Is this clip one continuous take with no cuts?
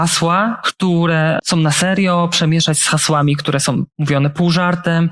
yes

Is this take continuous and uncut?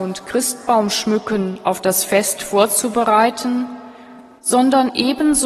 yes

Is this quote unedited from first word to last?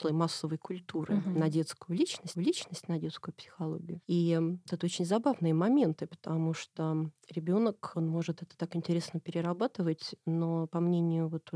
no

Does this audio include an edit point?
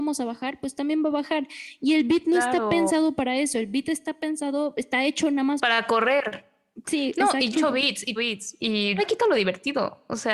yes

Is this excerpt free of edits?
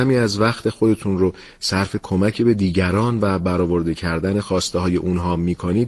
yes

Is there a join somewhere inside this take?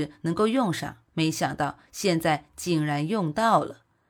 yes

